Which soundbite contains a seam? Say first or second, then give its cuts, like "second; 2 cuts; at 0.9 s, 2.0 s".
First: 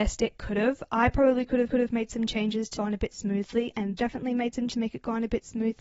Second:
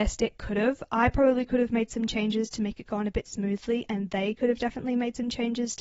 first; 4 cuts; at 1.7 s, 2.8 s, 4.0 s, 4.7 s